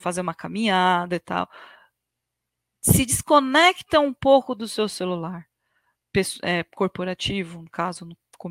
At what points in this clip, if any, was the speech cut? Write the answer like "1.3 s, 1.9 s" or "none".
none